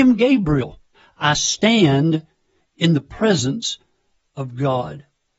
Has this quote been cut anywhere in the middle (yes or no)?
yes